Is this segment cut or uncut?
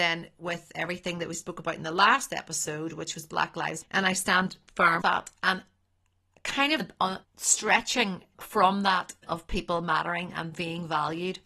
cut